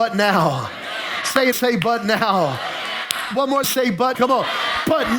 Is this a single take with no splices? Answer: no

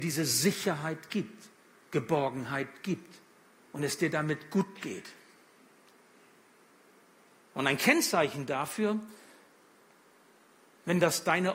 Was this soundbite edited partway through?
no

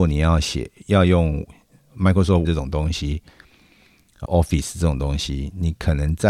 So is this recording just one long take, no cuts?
no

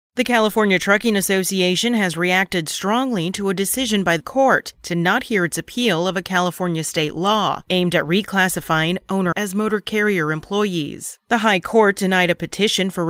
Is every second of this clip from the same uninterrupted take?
no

